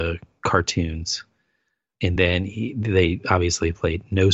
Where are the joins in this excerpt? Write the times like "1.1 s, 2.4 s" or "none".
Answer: none